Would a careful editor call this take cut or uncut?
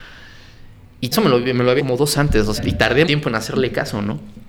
cut